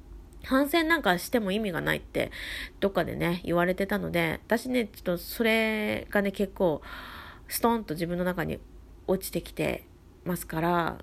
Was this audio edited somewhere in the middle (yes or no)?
no